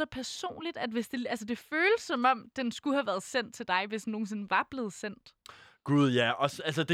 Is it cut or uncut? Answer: uncut